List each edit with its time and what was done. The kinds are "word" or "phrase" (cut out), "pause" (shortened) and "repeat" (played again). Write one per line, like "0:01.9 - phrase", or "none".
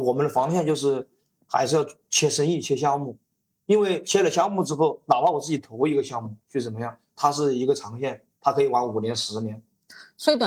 0:06.4 - pause